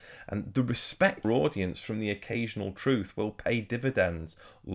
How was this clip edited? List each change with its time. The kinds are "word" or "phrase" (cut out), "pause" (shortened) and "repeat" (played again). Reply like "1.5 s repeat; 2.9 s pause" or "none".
1.2 s phrase